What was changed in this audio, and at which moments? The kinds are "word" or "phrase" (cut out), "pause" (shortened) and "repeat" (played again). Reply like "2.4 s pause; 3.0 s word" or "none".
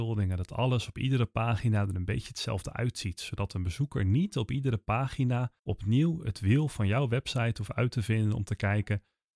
5.6 s pause